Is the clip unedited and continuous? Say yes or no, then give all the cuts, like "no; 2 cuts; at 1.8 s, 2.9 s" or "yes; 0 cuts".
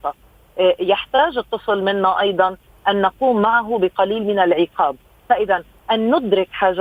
yes; 0 cuts